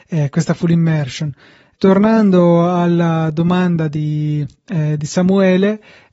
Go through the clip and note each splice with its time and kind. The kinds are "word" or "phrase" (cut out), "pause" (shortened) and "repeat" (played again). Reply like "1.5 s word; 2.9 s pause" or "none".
1.7 s word